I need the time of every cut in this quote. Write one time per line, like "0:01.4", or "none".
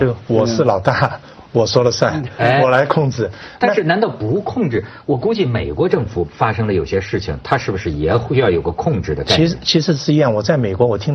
none